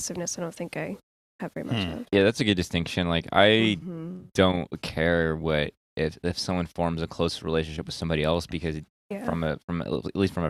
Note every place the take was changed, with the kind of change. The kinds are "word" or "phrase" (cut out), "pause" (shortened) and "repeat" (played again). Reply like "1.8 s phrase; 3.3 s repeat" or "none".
none